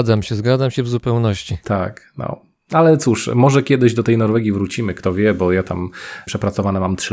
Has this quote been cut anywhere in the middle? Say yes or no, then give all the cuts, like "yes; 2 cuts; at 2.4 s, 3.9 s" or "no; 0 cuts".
no; 0 cuts